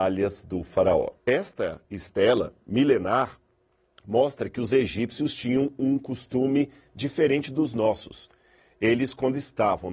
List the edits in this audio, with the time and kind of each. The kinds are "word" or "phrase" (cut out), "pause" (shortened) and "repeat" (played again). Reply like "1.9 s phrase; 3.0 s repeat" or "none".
1.2 s pause; 2.6 s pause